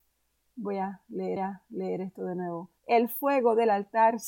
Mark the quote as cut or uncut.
cut